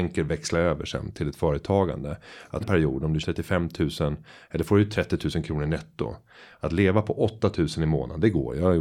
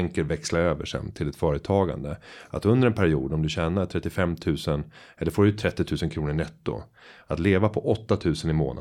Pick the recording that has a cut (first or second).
first